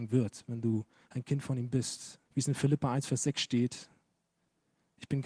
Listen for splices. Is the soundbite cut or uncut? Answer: cut